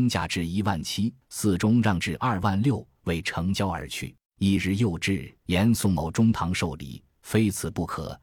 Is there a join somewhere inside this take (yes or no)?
yes